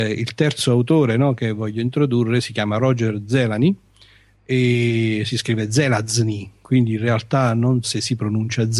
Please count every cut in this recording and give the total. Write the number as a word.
one